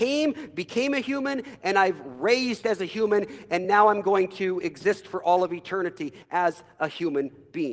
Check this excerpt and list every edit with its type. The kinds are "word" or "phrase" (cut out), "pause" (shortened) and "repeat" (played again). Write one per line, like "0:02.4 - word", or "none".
none